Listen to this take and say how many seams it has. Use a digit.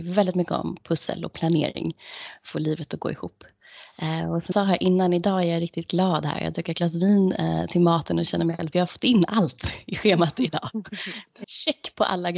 4